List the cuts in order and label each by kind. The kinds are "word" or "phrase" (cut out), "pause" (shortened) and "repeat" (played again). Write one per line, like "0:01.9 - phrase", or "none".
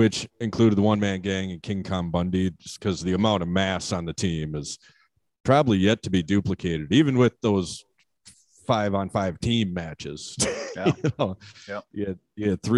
none